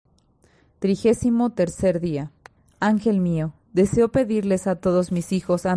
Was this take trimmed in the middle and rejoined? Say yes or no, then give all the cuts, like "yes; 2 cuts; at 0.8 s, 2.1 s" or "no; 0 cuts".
yes; 1 cut; at 2.6 s